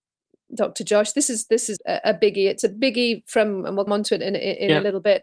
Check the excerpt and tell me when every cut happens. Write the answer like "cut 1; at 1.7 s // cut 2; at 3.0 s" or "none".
cut 1; at 1.8 s // cut 2; at 3.9 s